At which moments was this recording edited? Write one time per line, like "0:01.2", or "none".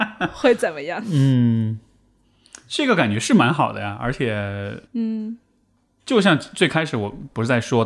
0:04.8